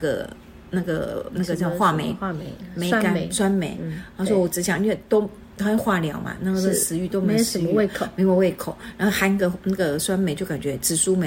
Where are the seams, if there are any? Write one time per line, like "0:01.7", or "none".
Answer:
0:01.3
0:05.1